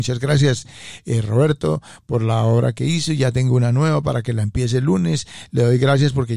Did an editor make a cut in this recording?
no; 0 cuts

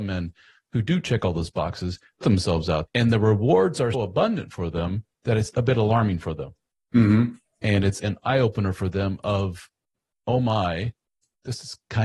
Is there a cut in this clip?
yes; 5 cuts; at 2.2 s, 2.9 s, 3.9 s, 5.5 s, 8.0 s

